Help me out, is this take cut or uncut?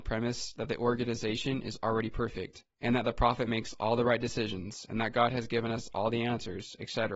cut